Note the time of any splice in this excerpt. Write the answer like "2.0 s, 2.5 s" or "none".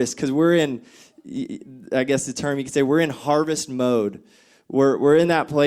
none